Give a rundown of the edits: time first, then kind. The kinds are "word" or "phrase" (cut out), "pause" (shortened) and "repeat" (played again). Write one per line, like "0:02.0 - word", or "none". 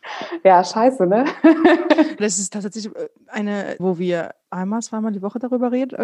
0:02.2 - word
0:03.8 - word